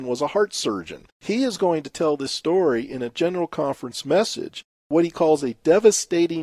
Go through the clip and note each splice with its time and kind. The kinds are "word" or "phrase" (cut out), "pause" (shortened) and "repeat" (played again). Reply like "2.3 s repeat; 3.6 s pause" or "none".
1.1 s pause